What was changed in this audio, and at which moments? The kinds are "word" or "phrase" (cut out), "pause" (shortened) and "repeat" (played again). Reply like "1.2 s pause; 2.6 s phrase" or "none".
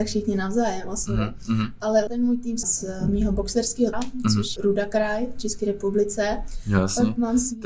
2.1 s word; 2.6 s word; 3.9 s word; 4.6 s word

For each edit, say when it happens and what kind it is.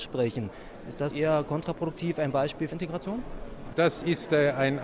1.1 s word; 2.7 s word

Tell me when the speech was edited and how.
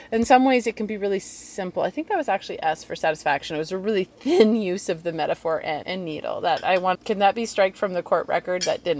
5.8 s word; 6.9 s word

